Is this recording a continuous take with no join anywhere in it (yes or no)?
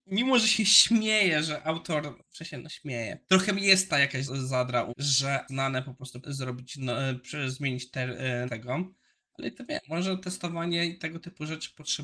no